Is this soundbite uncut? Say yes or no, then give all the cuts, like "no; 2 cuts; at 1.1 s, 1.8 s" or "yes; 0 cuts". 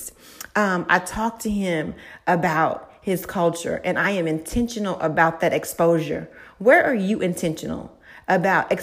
yes; 0 cuts